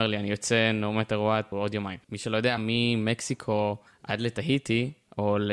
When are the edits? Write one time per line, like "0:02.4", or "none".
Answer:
0:01.5
0:02.0
0:02.6
0:03.9